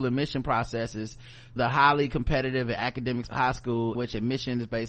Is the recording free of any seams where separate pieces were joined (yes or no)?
no